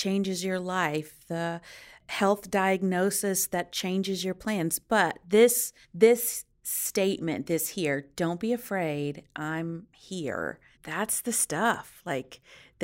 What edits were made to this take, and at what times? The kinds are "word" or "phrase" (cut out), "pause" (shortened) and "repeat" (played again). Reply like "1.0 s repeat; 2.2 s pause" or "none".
5.8 s pause; 10.7 s pause